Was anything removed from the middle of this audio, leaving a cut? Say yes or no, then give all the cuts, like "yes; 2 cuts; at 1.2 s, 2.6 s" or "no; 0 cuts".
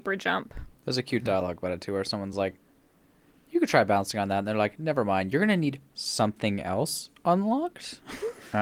no; 0 cuts